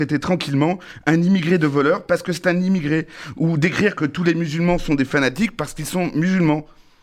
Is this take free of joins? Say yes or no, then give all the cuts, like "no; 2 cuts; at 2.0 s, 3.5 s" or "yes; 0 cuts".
yes; 0 cuts